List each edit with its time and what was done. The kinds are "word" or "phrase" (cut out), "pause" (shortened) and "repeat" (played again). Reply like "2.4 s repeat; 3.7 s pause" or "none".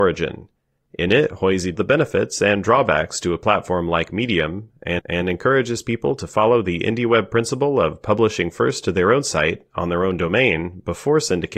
1.7 s phrase; 5.0 s repeat